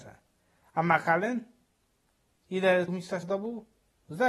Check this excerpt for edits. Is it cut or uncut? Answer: cut